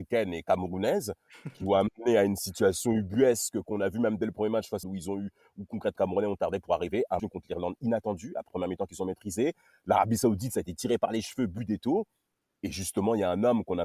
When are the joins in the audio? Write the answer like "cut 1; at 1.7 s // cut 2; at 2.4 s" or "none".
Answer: cut 1; at 4.8 s // cut 2; at 6.0 s // cut 3; at 7.2 s // cut 4; at 8.5 s